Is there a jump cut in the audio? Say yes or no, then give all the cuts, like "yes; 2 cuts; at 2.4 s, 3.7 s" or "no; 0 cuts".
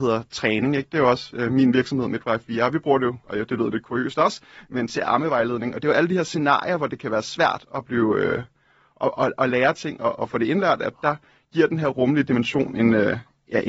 no; 0 cuts